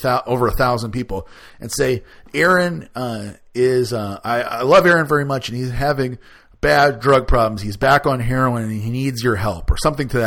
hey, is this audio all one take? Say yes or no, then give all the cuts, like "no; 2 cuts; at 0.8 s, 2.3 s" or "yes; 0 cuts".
yes; 0 cuts